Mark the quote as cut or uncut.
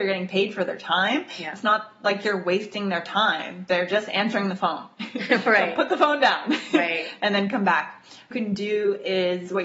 cut